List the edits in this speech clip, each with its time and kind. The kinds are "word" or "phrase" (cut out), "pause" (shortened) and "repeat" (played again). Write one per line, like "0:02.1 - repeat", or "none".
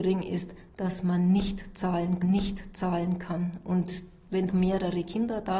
0:02.2 - repeat
0:04.5 - phrase